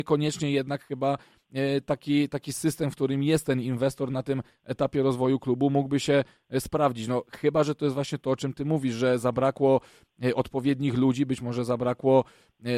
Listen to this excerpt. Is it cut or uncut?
uncut